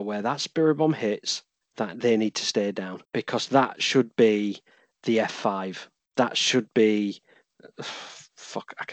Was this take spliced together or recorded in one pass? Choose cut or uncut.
cut